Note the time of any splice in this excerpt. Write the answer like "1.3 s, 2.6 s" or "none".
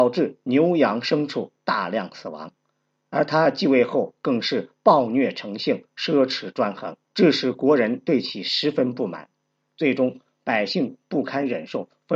7.0 s